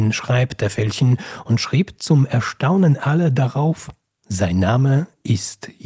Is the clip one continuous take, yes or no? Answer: yes